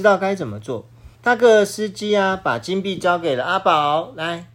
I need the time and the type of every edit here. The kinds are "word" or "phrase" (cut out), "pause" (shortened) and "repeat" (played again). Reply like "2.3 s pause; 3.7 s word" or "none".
1.1 s pause